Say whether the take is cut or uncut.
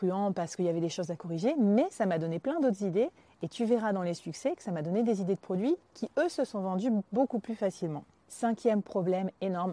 uncut